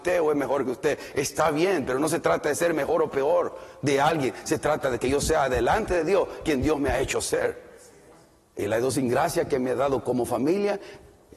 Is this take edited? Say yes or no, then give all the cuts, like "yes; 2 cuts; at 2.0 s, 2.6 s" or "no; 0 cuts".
no; 0 cuts